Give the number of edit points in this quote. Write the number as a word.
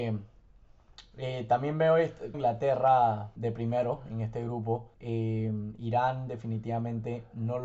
three